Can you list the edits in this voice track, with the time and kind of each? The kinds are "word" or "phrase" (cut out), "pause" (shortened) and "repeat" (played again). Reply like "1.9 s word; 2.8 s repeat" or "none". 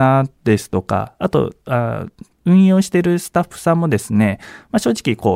2.3 s pause